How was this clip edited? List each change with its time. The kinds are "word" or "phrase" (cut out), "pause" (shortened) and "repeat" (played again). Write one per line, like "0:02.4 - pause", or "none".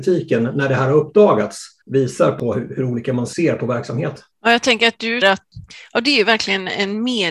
0:01.8 - pause
0:04.3 - pause
0:05.2 - word